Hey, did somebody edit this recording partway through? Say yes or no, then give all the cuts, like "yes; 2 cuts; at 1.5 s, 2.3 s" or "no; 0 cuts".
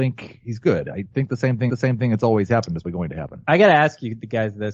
yes; 3 cuts; at 1.1 s, 1.7 s, 2.8 s